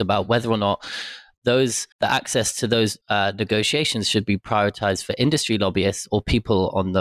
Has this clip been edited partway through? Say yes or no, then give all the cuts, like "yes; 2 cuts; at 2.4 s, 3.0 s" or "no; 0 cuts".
yes; 2 cuts; at 1.9 s, 3.0 s